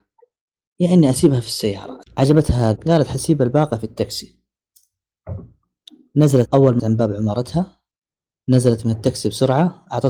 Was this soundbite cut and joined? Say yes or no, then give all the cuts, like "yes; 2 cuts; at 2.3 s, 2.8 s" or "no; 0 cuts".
yes; 3 cuts; at 2.8 s, 6.4 s, 6.8 s